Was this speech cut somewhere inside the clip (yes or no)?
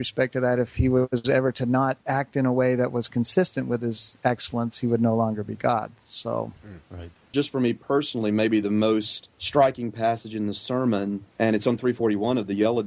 yes